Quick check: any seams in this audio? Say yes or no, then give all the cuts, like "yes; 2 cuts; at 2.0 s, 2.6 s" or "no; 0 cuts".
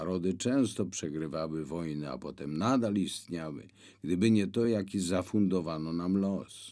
no; 0 cuts